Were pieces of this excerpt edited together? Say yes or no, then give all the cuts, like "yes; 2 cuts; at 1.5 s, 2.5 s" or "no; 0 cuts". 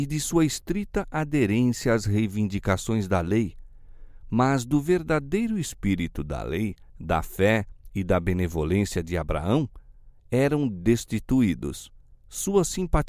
yes; 2 cuts; at 6.9 s, 12.1 s